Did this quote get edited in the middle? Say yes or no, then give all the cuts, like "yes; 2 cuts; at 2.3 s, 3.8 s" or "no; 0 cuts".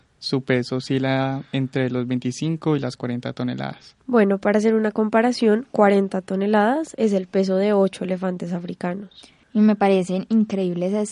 yes; 1 cut; at 9.4 s